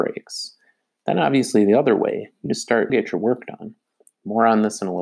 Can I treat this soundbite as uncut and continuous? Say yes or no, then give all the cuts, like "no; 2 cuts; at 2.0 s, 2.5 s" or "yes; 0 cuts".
no; 2 cuts; at 2.5 s, 2.9 s